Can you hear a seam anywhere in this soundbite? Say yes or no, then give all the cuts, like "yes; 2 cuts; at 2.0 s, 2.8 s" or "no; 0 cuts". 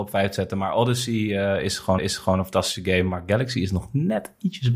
yes; 1 cut; at 2.0 s